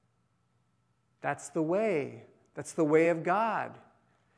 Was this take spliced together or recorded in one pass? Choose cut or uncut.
uncut